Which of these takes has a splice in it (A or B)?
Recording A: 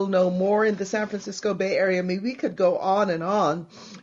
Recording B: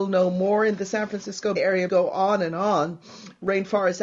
B